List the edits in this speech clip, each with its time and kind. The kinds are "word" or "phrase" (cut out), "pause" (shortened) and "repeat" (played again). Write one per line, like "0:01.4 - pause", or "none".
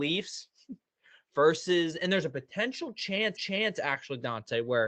0:03.3 - repeat

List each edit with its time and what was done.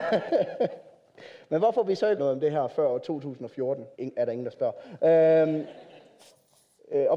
0:02.2 - word
0:03.9 - pause

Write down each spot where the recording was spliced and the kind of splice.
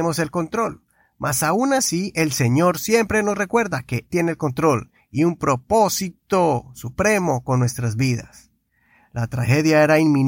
0:04.1 - word

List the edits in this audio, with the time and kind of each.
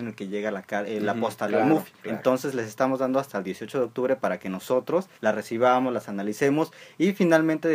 0:02.0 - pause
0:05.1 - pause

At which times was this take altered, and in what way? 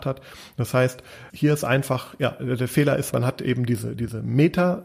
0:01.3 - word
0:03.1 - word

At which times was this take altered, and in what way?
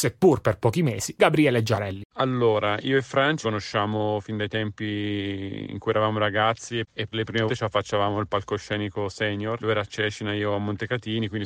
0:01.2 - word
0:03.4 - word
0:07.1 - word
0:07.5 - word

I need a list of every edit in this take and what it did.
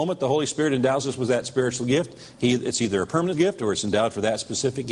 0:03.3 - word

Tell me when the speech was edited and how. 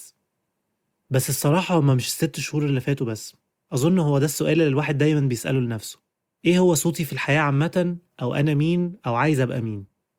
none

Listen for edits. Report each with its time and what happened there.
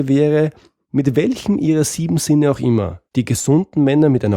0:03.1 - pause

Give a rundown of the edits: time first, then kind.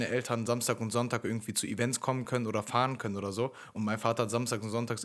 none

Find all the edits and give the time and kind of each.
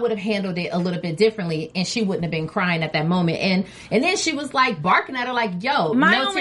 none

